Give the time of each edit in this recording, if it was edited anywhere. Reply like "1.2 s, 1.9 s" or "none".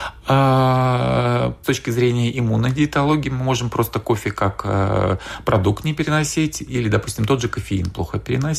1.6 s